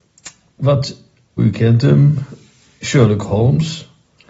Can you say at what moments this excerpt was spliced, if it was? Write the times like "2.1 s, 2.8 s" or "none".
1.4 s